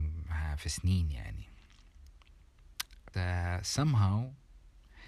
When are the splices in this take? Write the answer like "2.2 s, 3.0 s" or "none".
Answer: 3.1 s